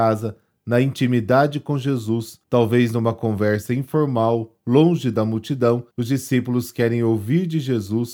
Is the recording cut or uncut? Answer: cut